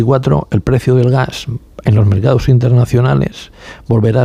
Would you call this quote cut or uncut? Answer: uncut